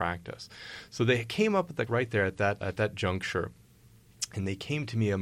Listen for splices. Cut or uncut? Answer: cut